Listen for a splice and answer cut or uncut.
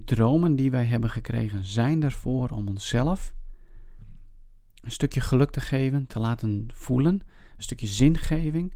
uncut